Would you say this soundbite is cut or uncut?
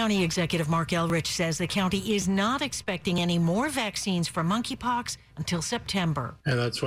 uncut